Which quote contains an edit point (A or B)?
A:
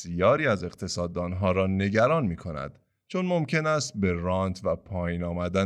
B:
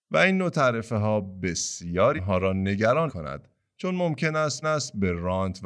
B